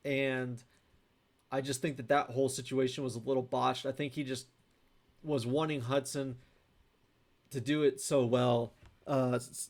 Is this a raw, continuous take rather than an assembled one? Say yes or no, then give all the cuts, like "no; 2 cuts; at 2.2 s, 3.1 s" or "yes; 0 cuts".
yes; 0 cuts